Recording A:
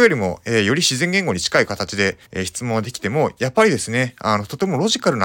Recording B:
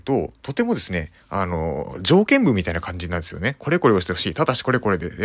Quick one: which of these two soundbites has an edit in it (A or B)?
A